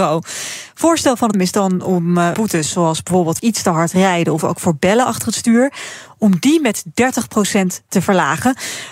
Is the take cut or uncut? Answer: cut